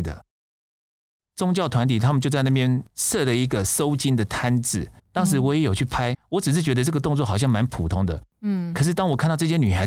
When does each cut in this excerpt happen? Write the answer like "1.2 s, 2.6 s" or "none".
5.0 s, 6.1 s